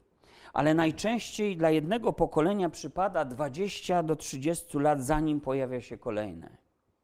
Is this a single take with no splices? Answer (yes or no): yes